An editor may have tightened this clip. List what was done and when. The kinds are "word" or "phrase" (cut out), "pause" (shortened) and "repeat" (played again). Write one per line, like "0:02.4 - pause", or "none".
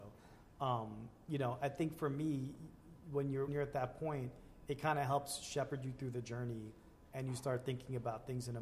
0:03.5 - word

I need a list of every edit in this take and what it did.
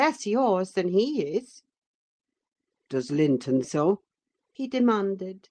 0:03.6 - word

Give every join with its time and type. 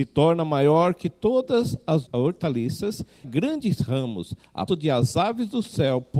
0:02.1 - word
0:03.2 - phrase
0:04.7 - word

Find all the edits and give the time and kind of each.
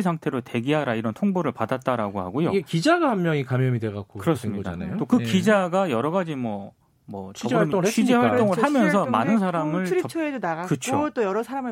none

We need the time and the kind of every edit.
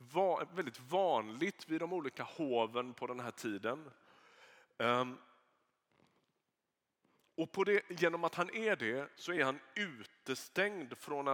none

